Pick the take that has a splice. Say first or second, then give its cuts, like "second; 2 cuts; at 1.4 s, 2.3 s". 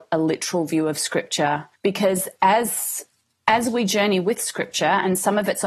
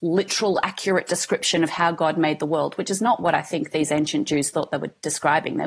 first; 2 cuts; at 1.8 s, 3.2 s